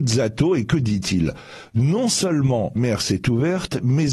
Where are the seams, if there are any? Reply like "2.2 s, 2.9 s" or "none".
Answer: 2.8 s